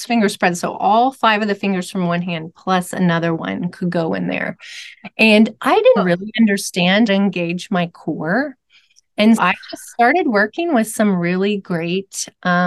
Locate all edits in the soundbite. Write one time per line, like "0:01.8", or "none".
0:06.0
0:07.1
0:09.4